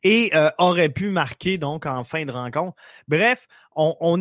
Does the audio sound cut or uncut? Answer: uncut